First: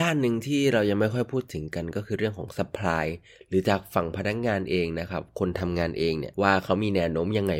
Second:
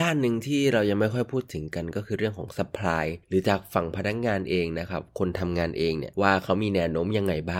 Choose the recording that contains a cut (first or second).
second